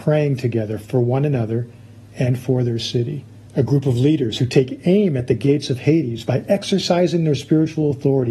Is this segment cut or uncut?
cut